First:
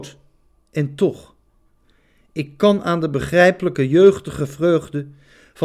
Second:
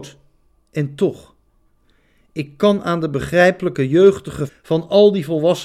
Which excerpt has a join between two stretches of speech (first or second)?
second